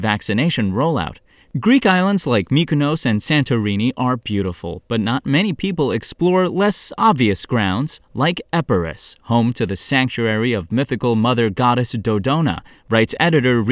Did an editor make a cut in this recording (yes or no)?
no